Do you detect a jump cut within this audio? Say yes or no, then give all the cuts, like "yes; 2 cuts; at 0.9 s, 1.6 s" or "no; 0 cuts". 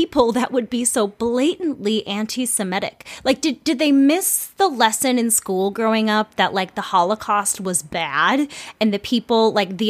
no; 0 cuts